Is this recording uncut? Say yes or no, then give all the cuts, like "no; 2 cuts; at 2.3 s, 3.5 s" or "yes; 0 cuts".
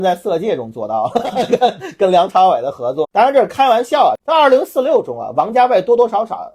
no; 2 cuts; at 3.0 s, 4.2 s